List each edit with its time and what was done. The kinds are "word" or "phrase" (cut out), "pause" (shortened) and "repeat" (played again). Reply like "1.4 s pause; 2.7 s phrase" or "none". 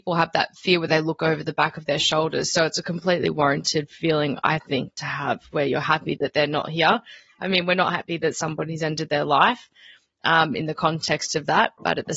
none